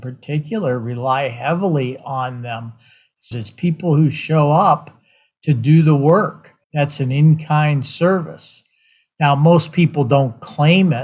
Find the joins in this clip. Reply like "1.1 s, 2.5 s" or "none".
3.3 s, 6.6 s